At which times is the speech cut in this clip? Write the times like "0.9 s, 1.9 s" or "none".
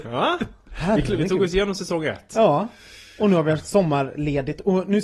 none